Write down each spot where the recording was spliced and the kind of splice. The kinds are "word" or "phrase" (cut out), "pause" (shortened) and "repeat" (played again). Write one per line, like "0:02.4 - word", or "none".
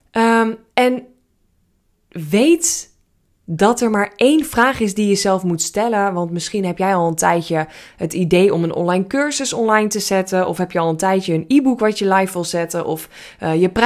none